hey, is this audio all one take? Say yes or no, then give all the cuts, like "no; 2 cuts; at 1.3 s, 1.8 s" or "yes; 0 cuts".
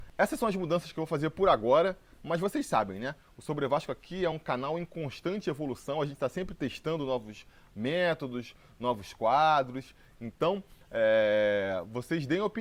yes; 0 cuts